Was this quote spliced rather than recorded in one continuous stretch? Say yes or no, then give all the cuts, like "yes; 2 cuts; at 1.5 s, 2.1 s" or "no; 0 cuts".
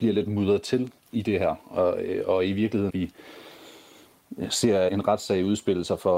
yes; 3 cuts; at 1.0 s, 2.9 s, 4.9 s